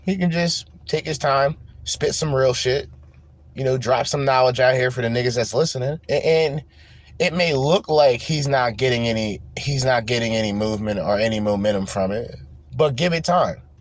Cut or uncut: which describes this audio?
cut